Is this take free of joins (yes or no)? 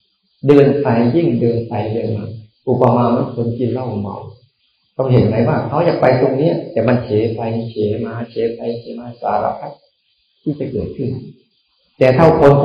yes